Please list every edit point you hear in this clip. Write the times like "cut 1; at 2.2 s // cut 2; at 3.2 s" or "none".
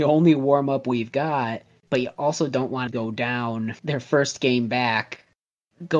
cut 1; at 1.8 s // cut 2; at 2.9 s // cut 3; at 3.8 s